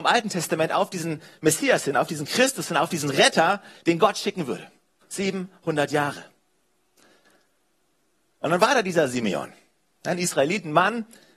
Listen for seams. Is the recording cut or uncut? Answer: uncut